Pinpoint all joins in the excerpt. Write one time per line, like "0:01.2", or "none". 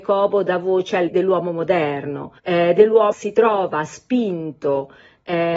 0:01.1
0:02.4
0:03.1

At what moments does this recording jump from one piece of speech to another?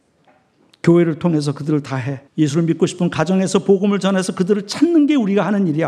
0:02.3

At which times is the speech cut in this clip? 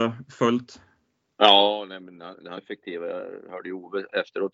0:02.6

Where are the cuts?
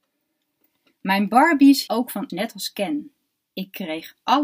0:01.9
0:02.3

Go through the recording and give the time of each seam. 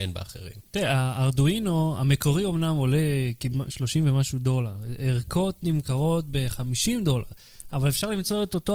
none

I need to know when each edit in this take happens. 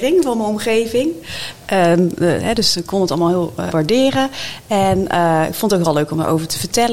0:03.7

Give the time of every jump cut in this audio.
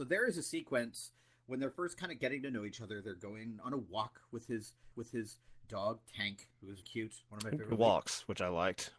0:04.9
0:06.8
0:07.7

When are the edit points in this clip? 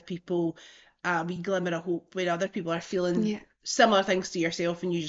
none

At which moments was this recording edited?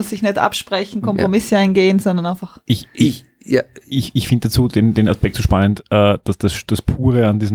0:03.8

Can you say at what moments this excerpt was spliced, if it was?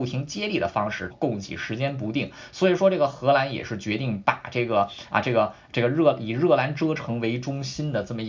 0:01.1

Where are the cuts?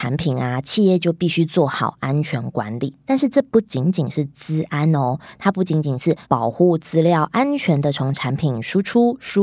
0:06.2

